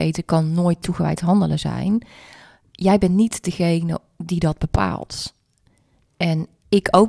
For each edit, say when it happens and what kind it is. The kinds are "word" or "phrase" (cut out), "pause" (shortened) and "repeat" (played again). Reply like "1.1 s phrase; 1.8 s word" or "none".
none

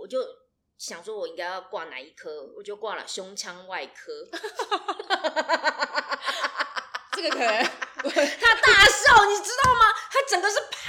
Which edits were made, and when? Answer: none

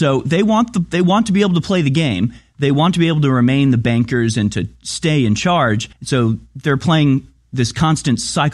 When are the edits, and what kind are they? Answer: 5.9 s pause

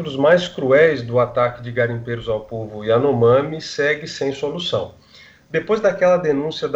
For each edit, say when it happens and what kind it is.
none

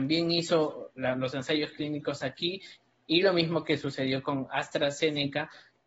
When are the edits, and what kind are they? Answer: none

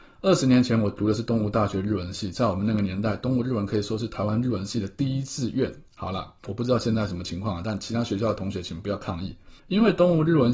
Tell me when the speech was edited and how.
5.9 s pause; 9.6 s pause

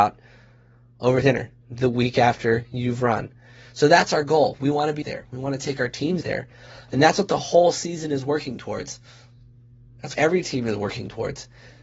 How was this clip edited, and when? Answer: 1.2 s word; 5.0 s word; 6.2 s word; 10.1 s word

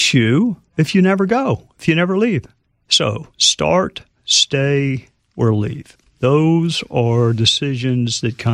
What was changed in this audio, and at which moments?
none

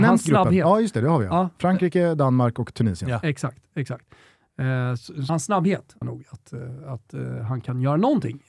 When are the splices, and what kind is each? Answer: 5.3 s word; 6.0 s phrase

